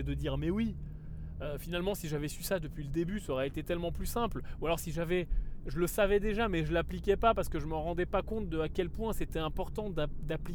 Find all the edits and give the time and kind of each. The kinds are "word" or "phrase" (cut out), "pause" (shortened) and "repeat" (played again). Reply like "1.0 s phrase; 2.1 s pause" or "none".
none